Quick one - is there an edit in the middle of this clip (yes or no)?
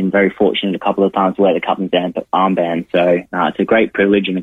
no